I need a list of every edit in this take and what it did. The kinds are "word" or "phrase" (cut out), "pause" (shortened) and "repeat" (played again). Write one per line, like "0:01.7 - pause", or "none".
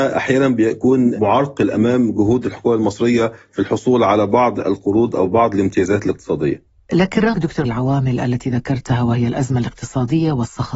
0:07.4 - word
0:07.7 - phrase

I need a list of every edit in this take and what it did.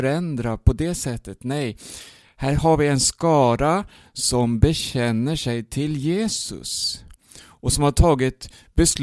none

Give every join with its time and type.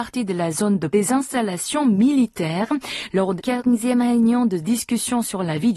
0:00.9 - word
0:03.4 - word

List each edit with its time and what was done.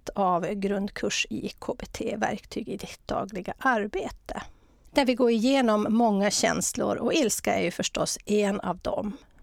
none

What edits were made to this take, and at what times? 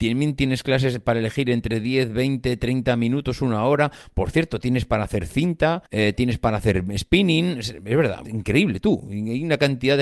0:05.9 - pause
0:08.2 - word

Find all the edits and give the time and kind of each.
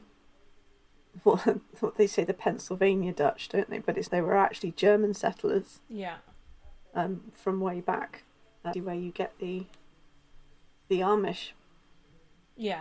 0:04.1 - word
0:06.9 - pause
0:08.7 - phrase

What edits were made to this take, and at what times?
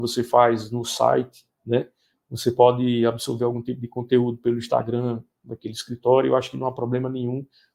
none

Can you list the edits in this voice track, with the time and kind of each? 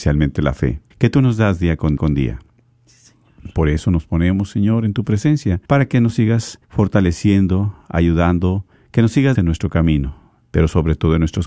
0:00.9 - pause
0:02.0 - repeat
0:05.7 - pause
0:06.6 - pause
0:08.7 - pause
0:09.3 - phrase

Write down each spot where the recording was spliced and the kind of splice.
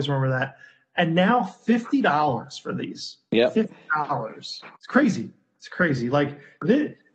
0:04.7 - pause

